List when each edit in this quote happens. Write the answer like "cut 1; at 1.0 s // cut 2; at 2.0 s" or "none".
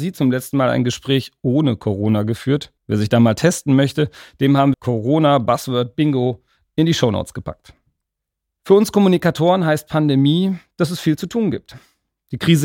cut 1; at 2.8 s // cut 2; at 4.7 s

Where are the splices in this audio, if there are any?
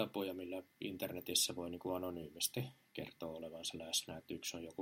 none

